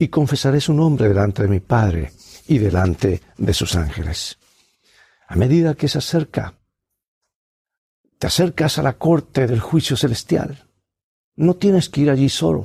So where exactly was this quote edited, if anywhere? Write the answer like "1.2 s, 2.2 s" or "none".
none